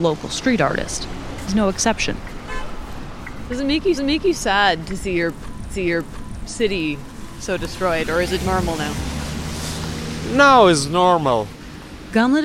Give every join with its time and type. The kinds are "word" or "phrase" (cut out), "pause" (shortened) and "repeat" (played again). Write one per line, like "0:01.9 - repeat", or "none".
0:04.0 - repeat
0:05.7 - repeat
0:08.4 - word